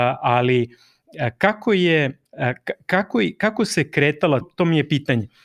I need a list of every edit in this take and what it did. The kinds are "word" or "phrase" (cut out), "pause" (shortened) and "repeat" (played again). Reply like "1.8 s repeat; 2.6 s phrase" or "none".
2.3 s pause; 4.4 s word